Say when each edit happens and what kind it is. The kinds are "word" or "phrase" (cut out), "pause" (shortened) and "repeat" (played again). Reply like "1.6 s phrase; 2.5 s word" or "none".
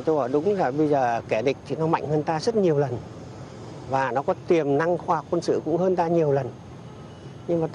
none